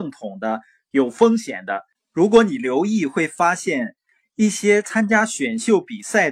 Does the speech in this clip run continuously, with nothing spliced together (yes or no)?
yes